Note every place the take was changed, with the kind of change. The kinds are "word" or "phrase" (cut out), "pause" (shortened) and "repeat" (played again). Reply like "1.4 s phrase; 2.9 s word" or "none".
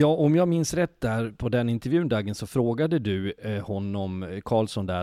none